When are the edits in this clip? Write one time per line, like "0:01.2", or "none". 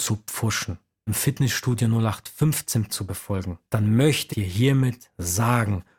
0:01.1
0:02.9
0:03.7
0:04.3